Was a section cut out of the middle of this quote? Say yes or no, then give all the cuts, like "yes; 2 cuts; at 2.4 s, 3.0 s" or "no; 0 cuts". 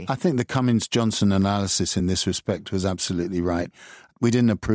no; 0 cuts